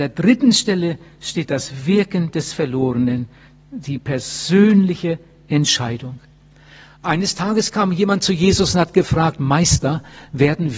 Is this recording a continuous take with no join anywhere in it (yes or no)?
yes